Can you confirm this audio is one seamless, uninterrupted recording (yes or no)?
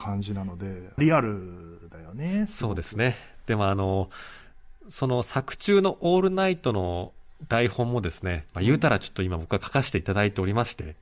no